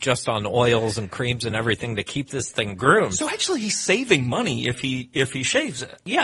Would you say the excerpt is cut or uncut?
uncut